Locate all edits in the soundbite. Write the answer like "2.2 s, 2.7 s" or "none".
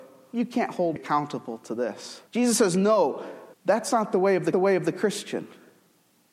1.0 s, 2.3 s, 3.5 s, 4.5 s